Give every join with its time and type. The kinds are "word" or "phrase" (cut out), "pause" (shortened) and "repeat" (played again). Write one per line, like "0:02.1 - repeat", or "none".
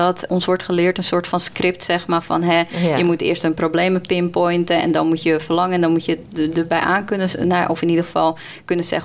none

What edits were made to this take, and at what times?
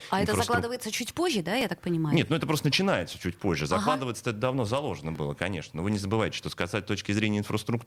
none

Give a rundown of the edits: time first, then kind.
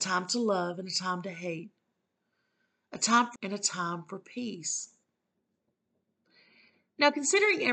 0:03.4 - word

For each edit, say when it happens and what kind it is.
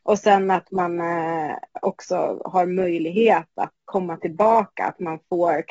0:03.8 - pause

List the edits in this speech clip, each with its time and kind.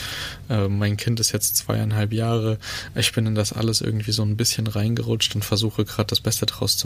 none

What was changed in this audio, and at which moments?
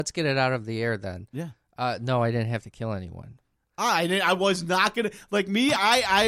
none

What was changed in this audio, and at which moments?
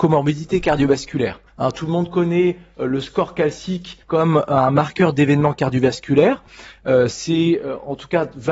0:01.5 - pause
0:04.0 - pause

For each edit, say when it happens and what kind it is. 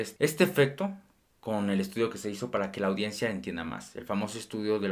none

